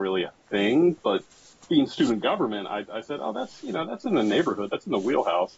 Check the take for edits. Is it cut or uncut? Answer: uncut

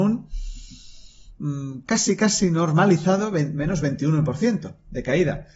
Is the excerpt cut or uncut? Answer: uncut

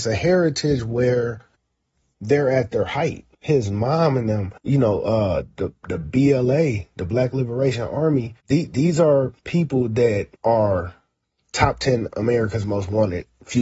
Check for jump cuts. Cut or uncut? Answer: cut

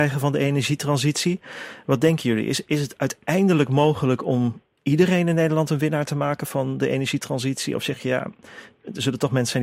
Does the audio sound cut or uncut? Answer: uncut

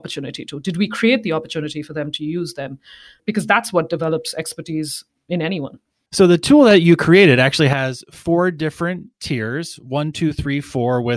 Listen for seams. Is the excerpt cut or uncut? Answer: uncut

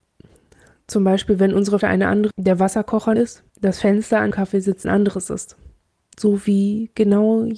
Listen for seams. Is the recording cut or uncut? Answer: cut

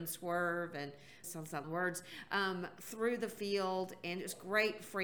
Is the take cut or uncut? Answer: cut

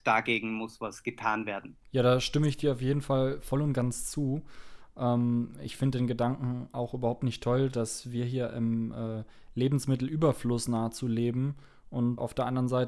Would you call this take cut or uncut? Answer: cut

